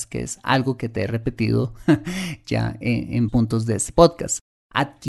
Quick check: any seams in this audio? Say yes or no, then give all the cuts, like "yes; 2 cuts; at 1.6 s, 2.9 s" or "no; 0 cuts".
yes; 1 cut; at 3.3 s